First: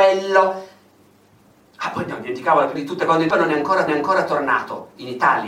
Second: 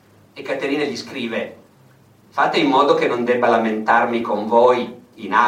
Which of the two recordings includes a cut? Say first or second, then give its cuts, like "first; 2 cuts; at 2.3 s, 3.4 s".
first; 3 cuts; at 2.8 s, 3.3 s, 3.9 s